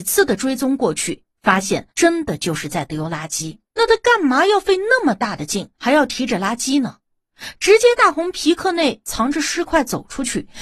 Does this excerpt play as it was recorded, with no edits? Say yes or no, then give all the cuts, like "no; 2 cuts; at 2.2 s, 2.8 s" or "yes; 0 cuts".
no; 3 cuts; at 1.9 s, 3.7 s, 5.8 s